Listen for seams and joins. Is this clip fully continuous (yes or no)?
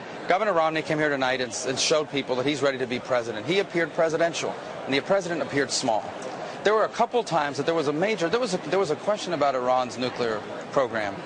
yes